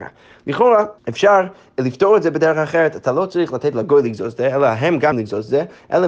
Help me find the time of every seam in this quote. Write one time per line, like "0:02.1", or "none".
0:01.0
0:05.1